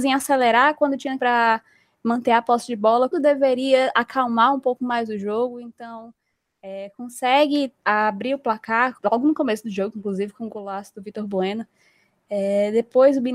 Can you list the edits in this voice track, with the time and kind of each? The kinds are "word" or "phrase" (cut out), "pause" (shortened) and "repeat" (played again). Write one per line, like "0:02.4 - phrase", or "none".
0:01.2 - phrase
0:03.1 - word
0:07.8 - pause
0:09.0 - word